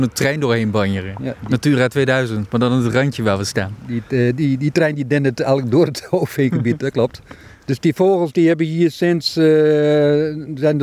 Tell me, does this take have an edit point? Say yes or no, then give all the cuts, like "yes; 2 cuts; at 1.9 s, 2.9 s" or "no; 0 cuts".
no; 0 cuts